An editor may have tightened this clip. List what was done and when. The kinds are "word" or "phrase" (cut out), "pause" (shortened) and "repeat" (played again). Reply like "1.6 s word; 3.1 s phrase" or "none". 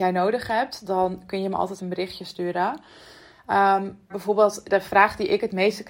1.8 s word; 4.1 s word; 4.7 s word